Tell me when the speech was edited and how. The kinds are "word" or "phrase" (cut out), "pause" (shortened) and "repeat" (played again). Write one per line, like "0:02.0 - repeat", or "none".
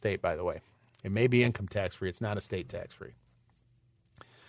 none